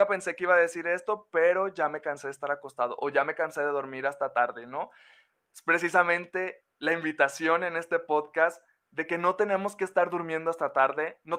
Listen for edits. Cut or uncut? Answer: uncut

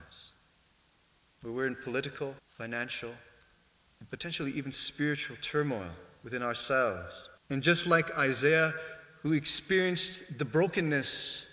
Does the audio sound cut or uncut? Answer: cut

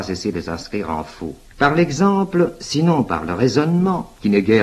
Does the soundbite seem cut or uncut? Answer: cut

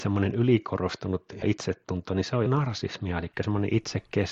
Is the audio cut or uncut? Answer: cut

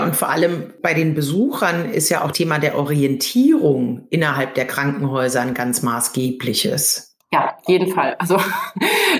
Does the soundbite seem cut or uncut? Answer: cut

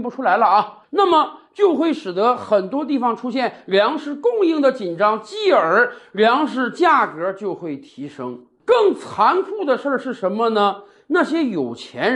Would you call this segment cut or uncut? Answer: uncut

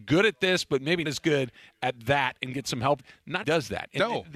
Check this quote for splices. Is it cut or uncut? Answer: cut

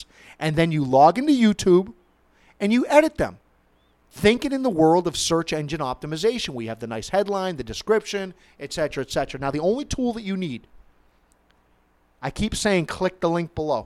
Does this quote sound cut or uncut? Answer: uncut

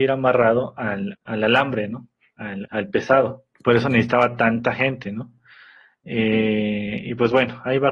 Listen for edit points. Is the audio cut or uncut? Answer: cut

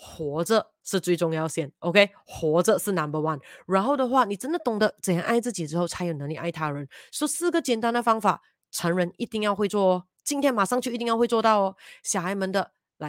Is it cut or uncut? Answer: uncut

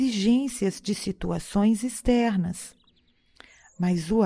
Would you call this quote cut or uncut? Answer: uncut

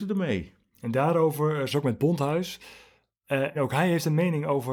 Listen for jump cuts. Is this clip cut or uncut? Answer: cut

